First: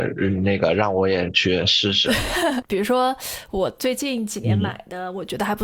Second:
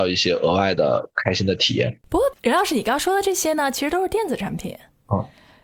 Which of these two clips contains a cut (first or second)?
second